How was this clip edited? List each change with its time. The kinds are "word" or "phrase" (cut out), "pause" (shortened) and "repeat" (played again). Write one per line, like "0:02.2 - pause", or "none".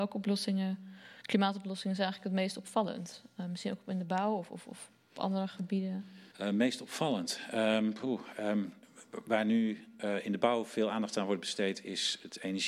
0:06.3 - pause